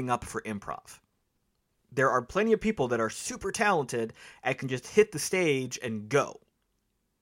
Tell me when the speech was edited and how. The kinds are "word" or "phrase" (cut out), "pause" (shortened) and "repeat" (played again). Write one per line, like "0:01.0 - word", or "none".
none